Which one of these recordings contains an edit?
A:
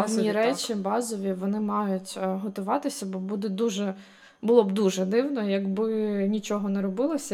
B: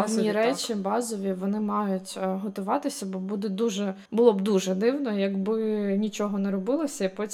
B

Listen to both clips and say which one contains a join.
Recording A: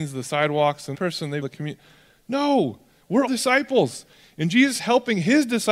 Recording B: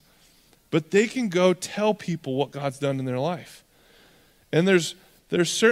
A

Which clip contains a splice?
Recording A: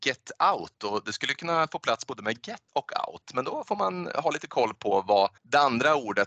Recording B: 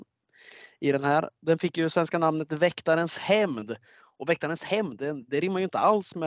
A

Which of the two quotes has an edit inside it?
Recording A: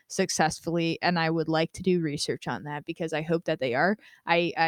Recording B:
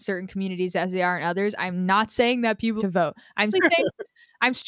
B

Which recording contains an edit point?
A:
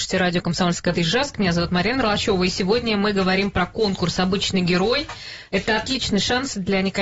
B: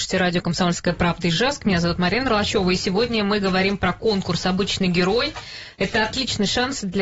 A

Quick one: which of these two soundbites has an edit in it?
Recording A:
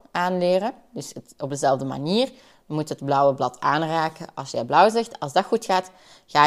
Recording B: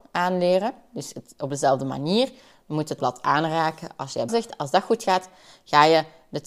B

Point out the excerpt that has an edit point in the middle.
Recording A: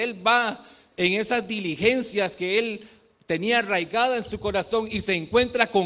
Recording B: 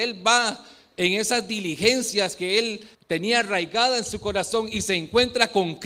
B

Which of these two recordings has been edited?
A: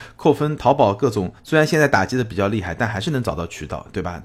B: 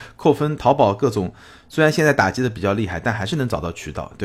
A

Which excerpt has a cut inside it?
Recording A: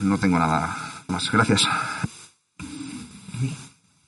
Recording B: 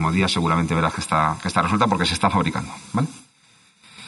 A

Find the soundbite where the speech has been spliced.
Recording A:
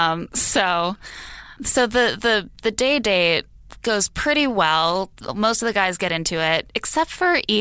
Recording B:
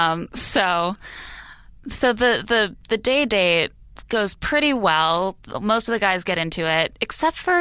A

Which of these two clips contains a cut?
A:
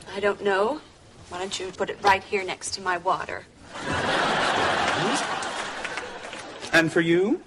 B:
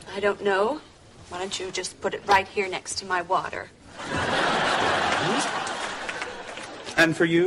A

